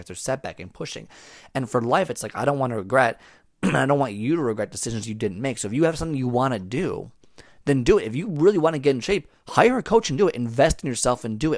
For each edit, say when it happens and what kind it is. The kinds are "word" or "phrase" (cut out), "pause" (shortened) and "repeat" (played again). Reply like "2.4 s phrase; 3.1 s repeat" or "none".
none